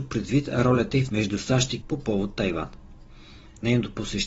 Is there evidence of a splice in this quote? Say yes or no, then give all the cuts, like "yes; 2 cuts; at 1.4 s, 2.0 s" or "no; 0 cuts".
yes; 2 cuts; at 1.1 s, 1.8 s